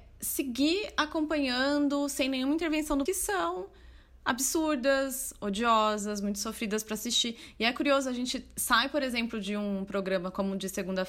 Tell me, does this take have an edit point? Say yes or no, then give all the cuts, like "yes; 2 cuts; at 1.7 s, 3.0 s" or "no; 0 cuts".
yes; 1 cut; at 3.1 s